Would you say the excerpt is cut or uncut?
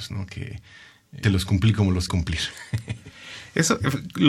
cut